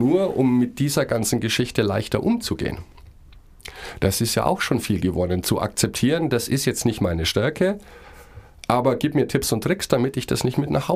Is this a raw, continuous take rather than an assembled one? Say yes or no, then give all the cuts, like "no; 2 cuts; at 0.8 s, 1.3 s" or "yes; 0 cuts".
yes; 0 cuts